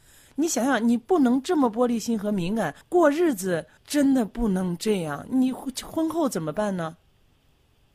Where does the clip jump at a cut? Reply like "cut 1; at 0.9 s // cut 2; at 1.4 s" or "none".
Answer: cut 1; at 2.8 s // cut 2; at 3.8 s